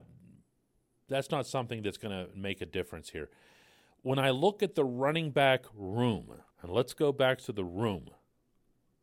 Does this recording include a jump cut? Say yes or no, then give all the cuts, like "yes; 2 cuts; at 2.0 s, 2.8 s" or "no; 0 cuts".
yes; 1 cut; at 6.5 s